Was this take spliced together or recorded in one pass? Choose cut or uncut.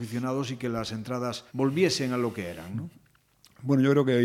cut